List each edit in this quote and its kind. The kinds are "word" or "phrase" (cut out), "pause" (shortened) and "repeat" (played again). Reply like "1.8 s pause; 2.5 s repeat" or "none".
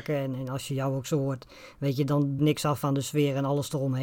2.4 s phrase

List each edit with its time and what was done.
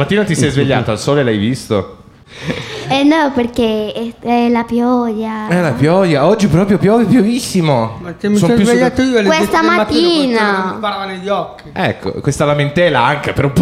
6.8 s word

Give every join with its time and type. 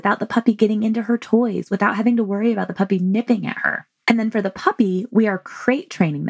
none

